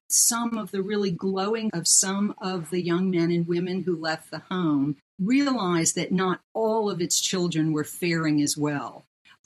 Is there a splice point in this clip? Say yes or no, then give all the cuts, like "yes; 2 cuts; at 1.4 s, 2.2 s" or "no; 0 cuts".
yes; 2 cuts; at 1.7 s, 5.0 s